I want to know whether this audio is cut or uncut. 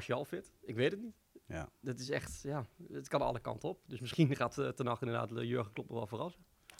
uncut